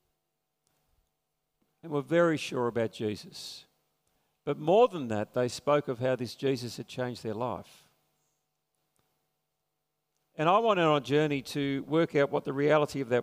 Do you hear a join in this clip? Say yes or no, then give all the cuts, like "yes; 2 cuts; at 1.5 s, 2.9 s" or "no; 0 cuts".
no; 0 cuts